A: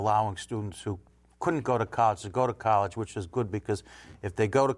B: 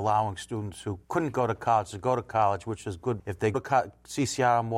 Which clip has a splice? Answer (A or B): B